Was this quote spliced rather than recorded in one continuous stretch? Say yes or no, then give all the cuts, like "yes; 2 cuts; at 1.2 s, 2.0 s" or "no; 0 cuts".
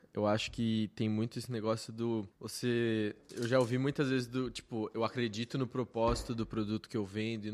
yes; 1 cut; at 2.3 s